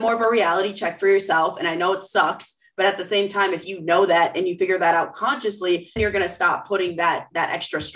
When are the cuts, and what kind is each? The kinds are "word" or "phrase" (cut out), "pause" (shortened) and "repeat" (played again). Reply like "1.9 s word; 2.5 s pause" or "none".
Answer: 6.0 s word